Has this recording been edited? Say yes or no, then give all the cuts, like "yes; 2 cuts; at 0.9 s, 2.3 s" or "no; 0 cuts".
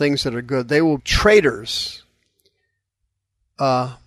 yes; 1 cut; at 1.0 s